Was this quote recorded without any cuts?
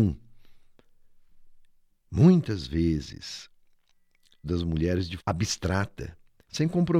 no; 2 cuts; at 4.4 s, 5.2 s

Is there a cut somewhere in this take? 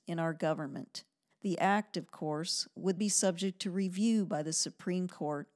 yes; 2 cuts; at 1.3 s, 3.0 s

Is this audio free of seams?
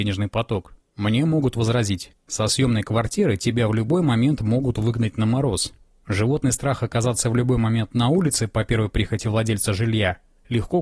yes; 0 cuts

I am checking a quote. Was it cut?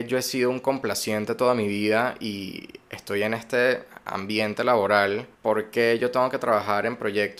yes; 1 cut; at 5.3 s

